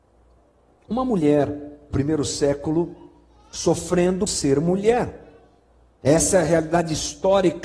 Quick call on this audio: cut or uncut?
cut